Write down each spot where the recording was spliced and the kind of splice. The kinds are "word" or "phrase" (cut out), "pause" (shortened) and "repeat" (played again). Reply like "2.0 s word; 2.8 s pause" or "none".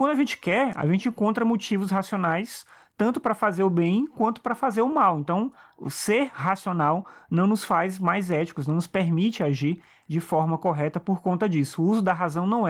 none